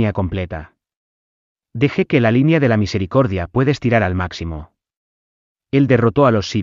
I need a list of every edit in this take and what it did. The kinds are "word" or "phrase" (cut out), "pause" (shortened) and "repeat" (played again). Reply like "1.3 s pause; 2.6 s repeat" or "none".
none